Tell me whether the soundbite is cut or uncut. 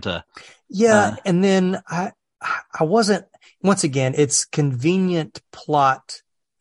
uncut